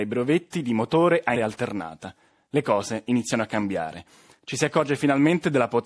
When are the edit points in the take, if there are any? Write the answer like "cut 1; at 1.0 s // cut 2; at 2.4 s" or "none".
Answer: cut 1; at 1.3 s

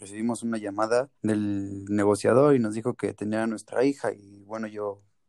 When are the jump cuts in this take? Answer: cut 1; at 1.1 s

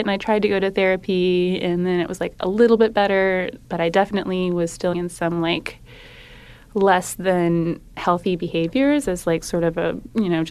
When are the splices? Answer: cut 1; at 4.9 s

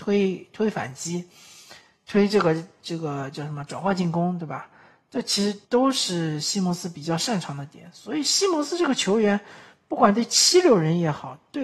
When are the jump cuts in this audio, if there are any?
cut 1; at 5.6 s

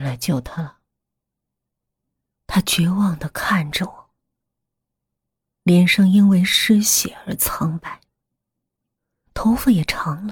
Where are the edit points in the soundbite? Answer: none

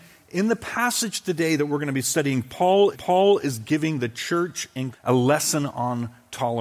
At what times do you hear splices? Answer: cut 1; at 2.9 s // cut 2; at 4.9 s

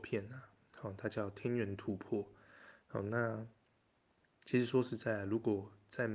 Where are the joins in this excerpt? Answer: none

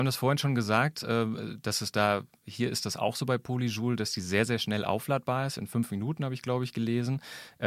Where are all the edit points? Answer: none

